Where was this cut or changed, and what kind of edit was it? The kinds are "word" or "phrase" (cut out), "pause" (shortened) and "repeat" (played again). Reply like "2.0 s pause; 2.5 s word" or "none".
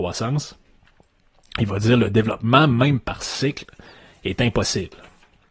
none